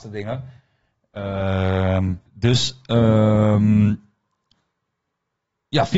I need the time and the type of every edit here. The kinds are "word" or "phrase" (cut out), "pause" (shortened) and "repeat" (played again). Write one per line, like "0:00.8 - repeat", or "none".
0:02.3 - pause

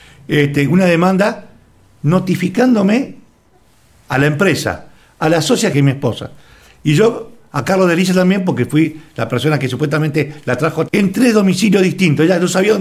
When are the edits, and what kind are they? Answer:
0:05.7 - word
0:10.9 - word

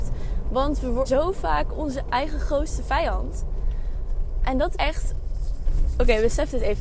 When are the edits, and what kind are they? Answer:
0:01.0 - word
0:02.0 - word
0:04.7 - word

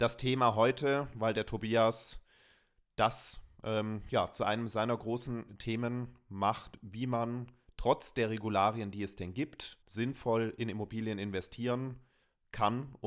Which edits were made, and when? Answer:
0:09.8 - pause

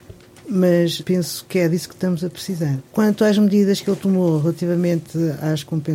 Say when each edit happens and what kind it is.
0:01.0 - word
0:02.9 - pause

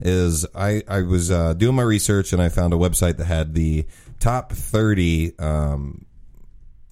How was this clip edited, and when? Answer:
none

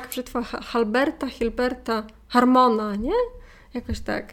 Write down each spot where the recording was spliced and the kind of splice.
none

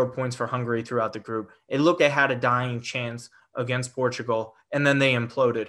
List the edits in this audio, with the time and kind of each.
0:02.0 - word

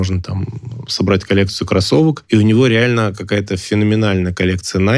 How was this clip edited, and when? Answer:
none

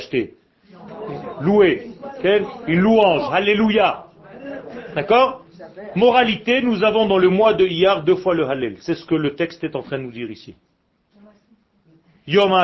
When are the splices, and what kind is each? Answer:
none

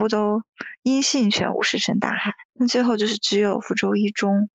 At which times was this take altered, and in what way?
0:02.5 - pause

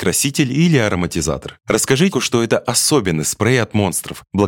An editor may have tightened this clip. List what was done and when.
0:02.1 - word

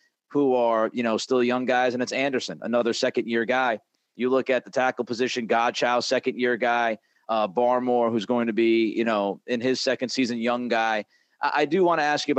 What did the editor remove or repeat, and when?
none

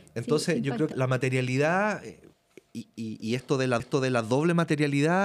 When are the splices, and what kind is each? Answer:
0:00.9 - word
0:03.8 - repeat

